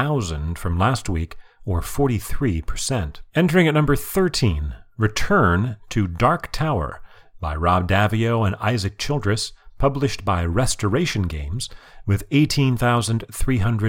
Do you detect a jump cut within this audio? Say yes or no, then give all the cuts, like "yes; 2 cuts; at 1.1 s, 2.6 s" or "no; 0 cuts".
yes; 1 cut; at 3.3 s